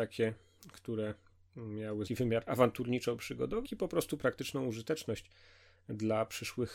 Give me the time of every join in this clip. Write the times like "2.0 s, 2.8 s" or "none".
2.1 s, 3.6 s, 4.2 s